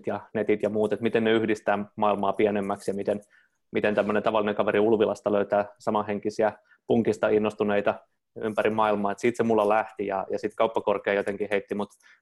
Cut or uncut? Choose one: uncut